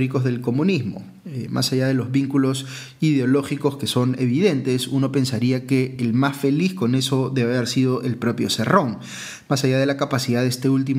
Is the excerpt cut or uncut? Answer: uncut